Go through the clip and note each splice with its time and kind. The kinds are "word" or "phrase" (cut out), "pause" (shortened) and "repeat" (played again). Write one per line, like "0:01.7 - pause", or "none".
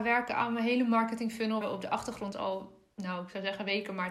0:01.6 - word
0:02.3 - word